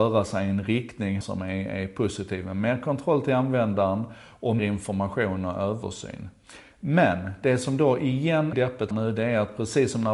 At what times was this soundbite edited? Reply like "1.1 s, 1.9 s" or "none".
1.2 s, 4.6 s, 8.5 s, 8.9 s